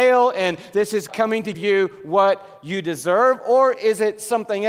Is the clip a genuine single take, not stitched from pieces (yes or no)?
no